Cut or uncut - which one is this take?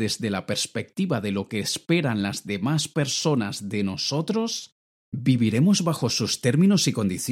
uncut